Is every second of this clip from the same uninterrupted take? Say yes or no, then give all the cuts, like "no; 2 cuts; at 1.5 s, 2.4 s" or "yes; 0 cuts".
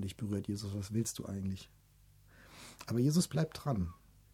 yes; 0 cuts